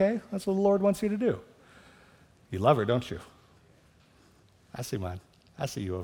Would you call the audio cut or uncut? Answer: uncut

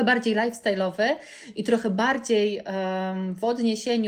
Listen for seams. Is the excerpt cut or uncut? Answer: uncut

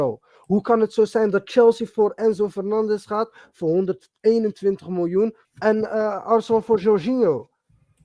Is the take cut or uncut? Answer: cut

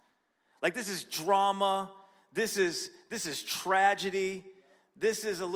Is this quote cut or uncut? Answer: uncut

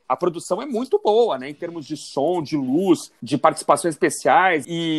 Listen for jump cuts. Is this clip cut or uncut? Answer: uncut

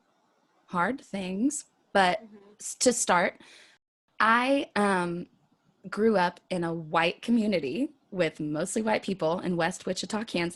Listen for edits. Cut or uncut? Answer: uncut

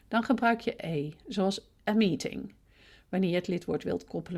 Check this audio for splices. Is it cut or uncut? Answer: uncut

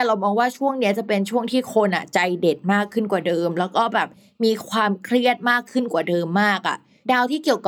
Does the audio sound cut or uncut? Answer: uncut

